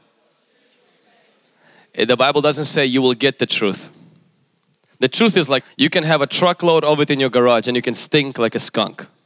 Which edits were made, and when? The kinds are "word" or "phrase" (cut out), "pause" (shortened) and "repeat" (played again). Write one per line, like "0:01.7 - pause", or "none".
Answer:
0:05.6 - word